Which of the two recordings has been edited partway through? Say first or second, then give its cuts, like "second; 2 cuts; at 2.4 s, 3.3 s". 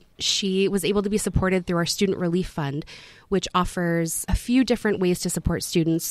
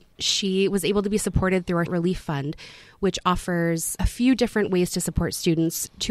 second; 1 cut; at 1.9 s